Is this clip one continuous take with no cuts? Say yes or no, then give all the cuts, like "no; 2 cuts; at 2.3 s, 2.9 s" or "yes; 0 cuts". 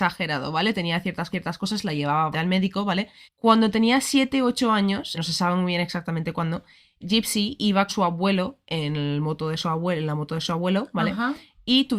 no; 6 cuts; at 1.3 s, 2.3 s, 3.2 s, 5.2 s, 7.0 s, 7.9 s